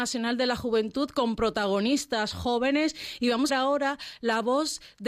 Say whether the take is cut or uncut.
cut